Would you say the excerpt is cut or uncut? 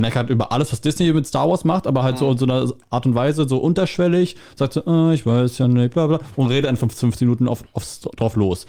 uncut